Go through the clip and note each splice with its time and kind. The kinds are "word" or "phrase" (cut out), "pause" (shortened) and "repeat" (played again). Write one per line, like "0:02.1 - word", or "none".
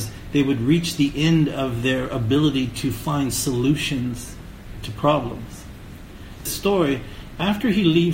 0:06.5 - phrase